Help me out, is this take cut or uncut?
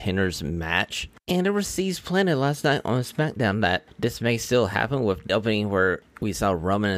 cut